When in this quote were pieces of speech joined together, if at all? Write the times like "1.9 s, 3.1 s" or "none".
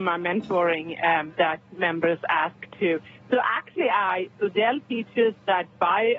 none